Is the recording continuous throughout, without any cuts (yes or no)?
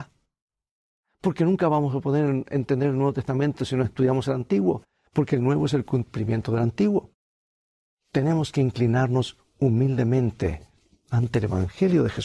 yes